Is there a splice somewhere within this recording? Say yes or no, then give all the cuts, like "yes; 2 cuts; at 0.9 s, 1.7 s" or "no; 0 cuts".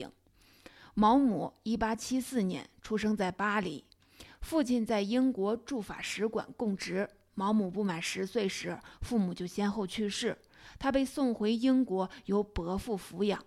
no; 0 cuts